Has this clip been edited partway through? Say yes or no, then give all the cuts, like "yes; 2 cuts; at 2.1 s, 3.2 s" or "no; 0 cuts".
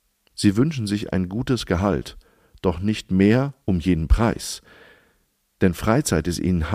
no; 0 cuts